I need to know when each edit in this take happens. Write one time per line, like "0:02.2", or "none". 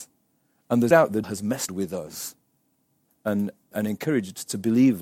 0:00.9
0:01.2
0:01.7
0:03.1
0:03.7